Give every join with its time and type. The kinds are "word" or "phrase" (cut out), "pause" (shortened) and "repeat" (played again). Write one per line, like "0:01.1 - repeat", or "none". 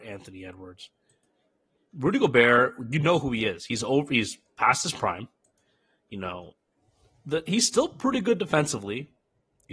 none